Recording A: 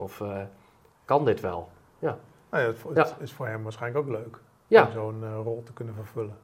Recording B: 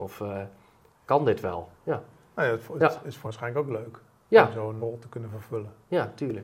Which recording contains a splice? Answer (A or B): B